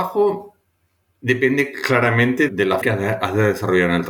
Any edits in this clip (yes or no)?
yes